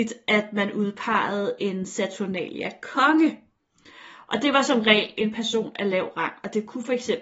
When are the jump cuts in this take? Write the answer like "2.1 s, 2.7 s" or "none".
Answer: none